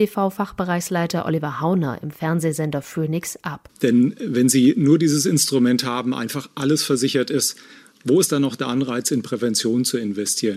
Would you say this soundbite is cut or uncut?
uncut